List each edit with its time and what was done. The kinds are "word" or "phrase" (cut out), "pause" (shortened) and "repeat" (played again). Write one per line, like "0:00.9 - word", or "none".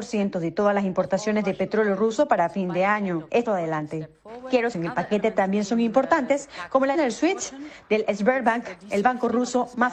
0:03.5 - phrase
0:04.7 - phrase
0:06.9 - word